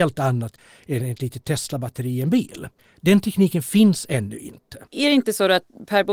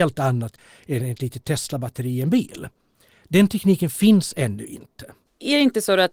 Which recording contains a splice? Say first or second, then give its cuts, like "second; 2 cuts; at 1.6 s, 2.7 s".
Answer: first; 2 cuts; at 2.8 s, 4.9 s